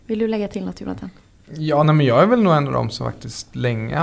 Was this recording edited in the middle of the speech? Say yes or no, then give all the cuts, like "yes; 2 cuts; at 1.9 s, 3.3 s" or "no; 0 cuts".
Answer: no; 0 cuts